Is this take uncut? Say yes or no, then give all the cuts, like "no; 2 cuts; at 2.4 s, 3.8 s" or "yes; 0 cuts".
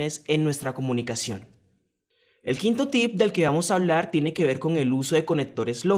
yes; 0 cuts